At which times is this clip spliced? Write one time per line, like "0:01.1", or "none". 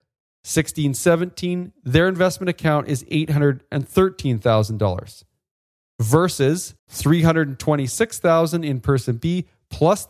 0:06.8